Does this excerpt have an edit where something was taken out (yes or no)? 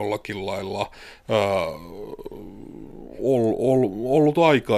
no